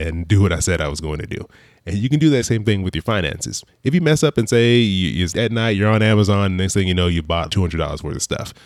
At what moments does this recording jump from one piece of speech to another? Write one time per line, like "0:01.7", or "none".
0:02.4
0:05.3
0:07.5